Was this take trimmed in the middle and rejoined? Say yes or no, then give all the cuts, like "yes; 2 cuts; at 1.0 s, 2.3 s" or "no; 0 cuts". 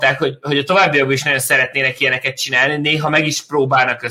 no; 0 cuts